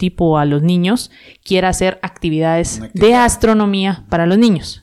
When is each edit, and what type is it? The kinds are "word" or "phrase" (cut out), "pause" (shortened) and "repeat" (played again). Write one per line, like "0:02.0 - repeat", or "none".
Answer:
none

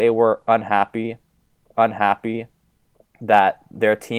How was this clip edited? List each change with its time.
0:01.7 - repeat

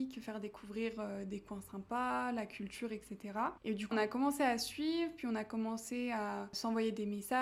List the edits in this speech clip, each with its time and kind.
0:03.9 - word

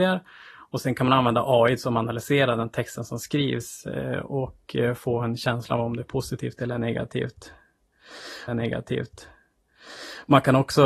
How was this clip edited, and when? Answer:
0:08.5 - repeat

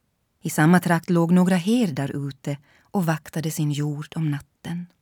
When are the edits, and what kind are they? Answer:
none

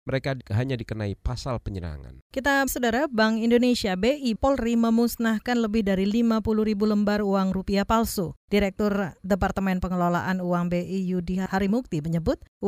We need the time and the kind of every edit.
0:02.7 - word
0:04.4 - word

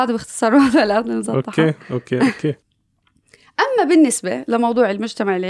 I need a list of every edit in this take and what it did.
0:02.6 - pause

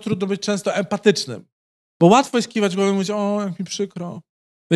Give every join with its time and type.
none

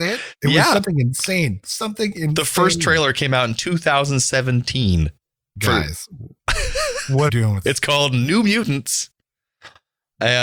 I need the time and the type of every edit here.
0:05.2 - pause
0:07.3 - phrase
0:07.6 - phrase

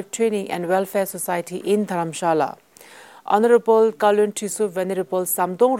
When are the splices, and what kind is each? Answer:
none

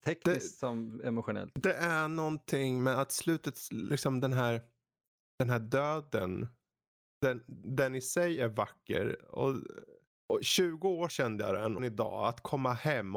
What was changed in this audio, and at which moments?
0:11.1 - word
0:11.8 - phrase

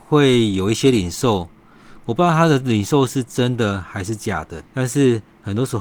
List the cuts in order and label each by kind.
0:04.7 - pause

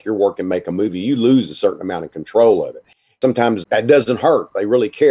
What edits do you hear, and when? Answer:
0:03.6 - word

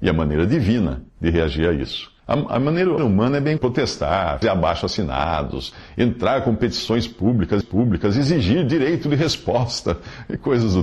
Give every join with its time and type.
0:01.1 - pause
0:02.2 - pause
0:03.0 - word
0:03.6 - word
0:04.4 - word
0:07.6 - repeat

